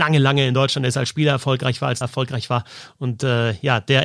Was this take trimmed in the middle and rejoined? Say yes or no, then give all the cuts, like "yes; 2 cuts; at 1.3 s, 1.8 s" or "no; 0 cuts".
yes; 1 cut; at 2.0 s